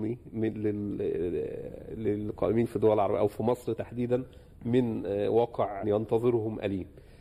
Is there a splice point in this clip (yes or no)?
yes